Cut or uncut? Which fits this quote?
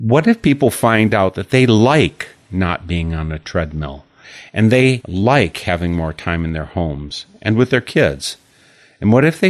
uncut